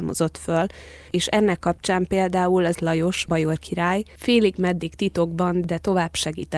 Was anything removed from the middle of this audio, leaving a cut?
yes; 2 cuts; at 1.1 s, 2.7 s

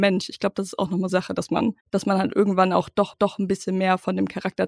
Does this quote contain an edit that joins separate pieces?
yes; 3 cuts; at 1.1 s, 1.8 s, 3.1 s

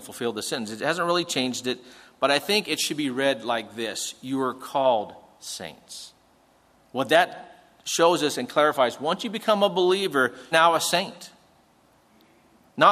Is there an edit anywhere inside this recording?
yes; 1 cut; at 10.5 s

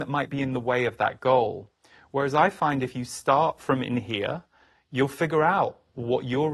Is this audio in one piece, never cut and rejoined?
yes; 0 cuts

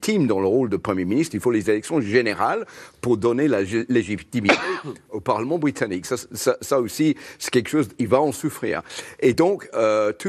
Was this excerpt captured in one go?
yes; 0 cuts

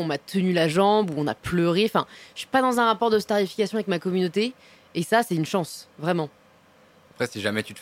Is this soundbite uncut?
yes; 0 cuts

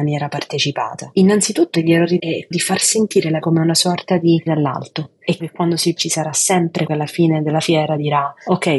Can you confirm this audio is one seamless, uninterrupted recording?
no; 8 cuts; at 1.7 s, 2.2 s, 2.5 s, 3.4 s, 4.5 s, 5.4 s, 6.0 s, 6.9 s

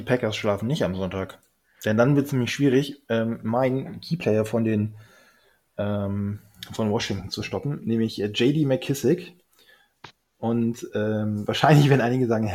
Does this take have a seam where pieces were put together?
no; 0 cuts

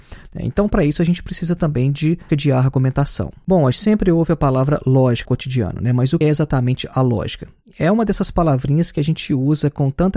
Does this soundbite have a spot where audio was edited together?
yes; 4 cuts; at 2.3 s, 3.7 s, 5.2 s, 6.2 s

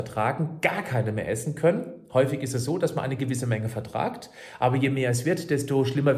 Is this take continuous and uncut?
yes; 0 cuts

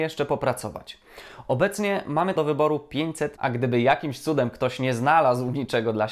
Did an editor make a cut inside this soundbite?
yes; 2 cuts; at 2.4 s, 3.4 s

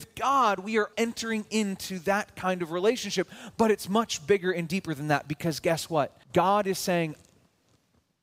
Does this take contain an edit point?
yes; 2 cuts; at 0.9 s, 6.2 s

